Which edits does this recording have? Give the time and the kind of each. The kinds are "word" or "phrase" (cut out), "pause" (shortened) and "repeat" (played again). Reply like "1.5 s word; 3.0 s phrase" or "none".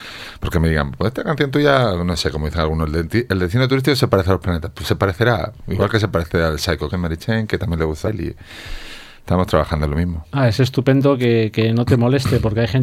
6.9 s word; 8.1 s word